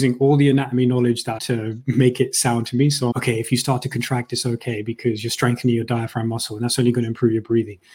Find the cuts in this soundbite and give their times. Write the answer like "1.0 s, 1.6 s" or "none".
1.4 s, 2.6 s, 3.1 s